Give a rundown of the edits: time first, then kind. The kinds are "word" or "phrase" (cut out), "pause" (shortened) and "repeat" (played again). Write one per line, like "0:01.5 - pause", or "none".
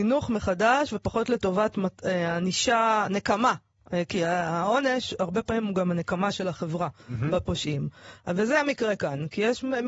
none